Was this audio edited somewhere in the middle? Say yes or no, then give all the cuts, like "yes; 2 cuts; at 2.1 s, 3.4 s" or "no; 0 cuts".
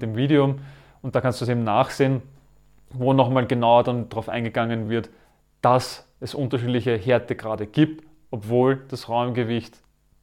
no; 0 cuts